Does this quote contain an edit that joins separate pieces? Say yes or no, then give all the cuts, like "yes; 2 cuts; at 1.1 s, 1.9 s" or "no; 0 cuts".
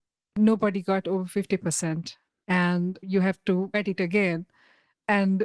yes; 2 cuts; at 3.0 s, 3.7 s